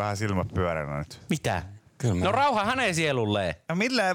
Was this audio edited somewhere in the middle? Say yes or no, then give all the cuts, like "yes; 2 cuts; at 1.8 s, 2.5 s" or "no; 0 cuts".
yes; 1 cut; at 1.9 s